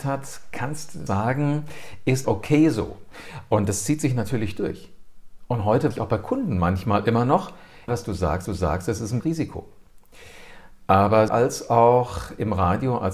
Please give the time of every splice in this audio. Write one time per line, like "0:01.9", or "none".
0:01.1
0:02.2
0:05.9
0:07.9
0:08.4
0:09.2
0:11.3